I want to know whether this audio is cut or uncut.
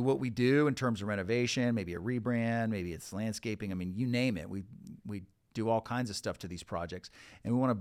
uncut